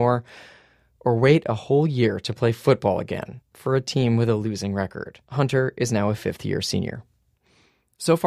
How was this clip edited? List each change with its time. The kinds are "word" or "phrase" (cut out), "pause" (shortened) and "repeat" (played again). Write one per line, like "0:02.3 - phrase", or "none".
0:03.4 - pause
0:05.2 - pause